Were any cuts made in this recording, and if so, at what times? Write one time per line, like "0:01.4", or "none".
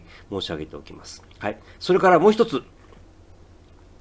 0:01.3